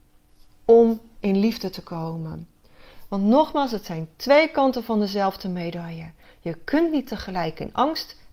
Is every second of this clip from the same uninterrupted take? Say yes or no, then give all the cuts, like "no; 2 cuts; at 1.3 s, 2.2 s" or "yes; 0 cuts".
yes; 0 cuts